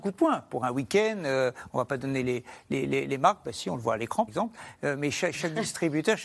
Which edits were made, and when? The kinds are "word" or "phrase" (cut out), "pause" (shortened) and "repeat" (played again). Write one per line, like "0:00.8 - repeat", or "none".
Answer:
0:04.3 - word